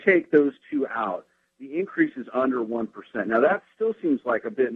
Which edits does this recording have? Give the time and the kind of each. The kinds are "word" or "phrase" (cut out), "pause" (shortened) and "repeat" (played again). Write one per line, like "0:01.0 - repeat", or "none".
none